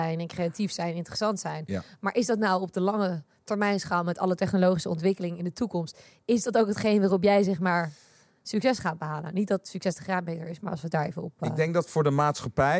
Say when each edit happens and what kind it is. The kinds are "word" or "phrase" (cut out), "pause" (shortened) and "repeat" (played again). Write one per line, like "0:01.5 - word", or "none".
none